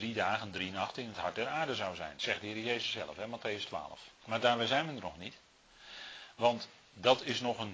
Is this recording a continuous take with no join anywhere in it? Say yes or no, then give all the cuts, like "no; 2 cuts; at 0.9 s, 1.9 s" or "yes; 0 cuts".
no; 1 cut; at 4.1 s